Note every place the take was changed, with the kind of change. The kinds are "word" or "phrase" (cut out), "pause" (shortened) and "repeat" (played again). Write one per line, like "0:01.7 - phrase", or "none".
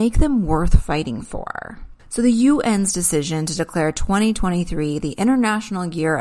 0:02.0 - pause